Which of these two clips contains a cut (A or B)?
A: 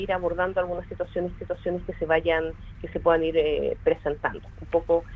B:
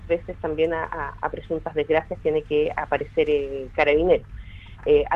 A